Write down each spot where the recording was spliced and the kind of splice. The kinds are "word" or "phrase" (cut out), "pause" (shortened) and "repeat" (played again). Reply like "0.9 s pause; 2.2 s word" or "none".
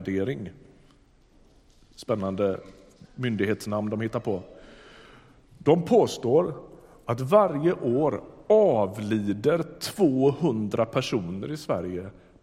none